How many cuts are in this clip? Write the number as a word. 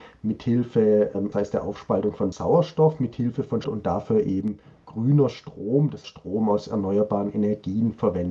four